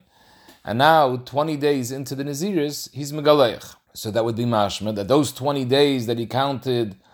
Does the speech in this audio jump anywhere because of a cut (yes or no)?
yes